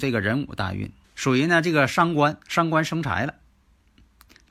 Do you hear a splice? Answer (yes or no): yes